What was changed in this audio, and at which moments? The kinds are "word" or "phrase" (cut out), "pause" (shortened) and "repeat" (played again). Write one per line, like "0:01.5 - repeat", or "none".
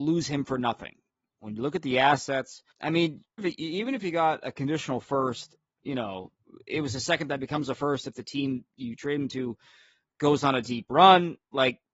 0:02.7 - pause
0:03.4 - word